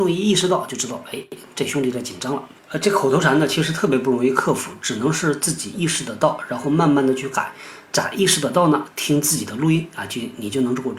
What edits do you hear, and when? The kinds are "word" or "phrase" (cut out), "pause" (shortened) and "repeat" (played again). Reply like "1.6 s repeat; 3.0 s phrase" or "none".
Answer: 2.6 s pause